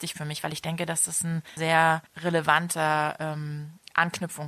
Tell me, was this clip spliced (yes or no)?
yes